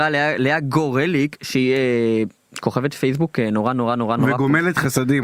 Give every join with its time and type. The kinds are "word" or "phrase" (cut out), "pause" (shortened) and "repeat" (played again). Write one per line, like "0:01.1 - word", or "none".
0:04.2 - word